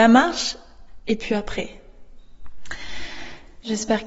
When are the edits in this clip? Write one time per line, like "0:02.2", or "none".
none

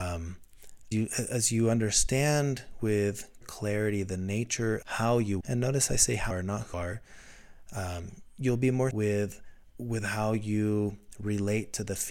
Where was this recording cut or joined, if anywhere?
0:00.9
0:03.4
0:04.8
0:05.4
0:06.3
0:06.7
0:08.9
0:09.6

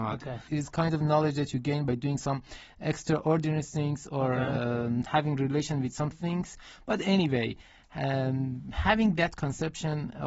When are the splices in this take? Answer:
0:06.1

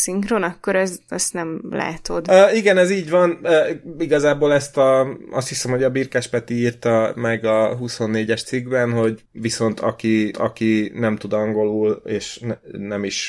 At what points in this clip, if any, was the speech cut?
0:10.3

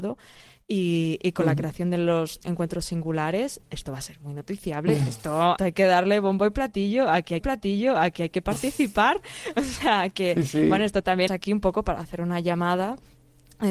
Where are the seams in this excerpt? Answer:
0:02.4
0:05.6
0:07.4
0:11.3

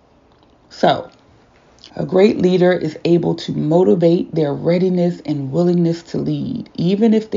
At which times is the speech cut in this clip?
0:01.9

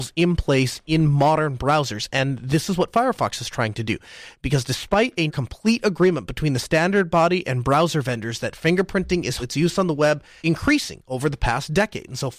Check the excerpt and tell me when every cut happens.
0:05.3
0:09.4
0:10.4

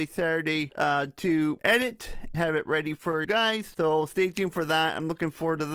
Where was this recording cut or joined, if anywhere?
0:02.3
0:03.2

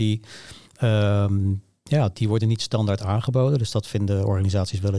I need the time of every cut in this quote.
0:02.1

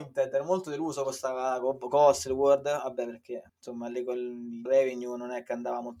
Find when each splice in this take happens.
0:03.5
0:04.7

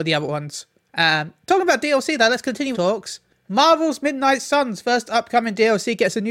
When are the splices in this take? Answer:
0:02.7

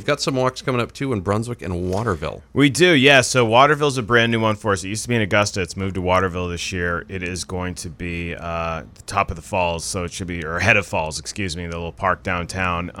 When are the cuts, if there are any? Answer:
none

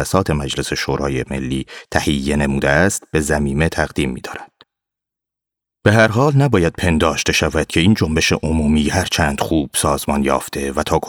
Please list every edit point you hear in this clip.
none

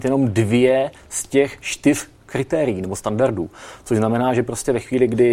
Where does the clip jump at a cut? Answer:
none

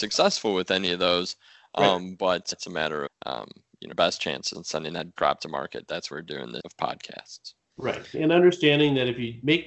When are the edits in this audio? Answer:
0:02.5
0:03.1
0:03.9
0:04.5
0:05.2
0:06.1
0:06.6
0:08.1

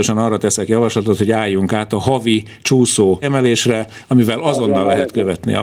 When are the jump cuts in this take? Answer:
0:03.2

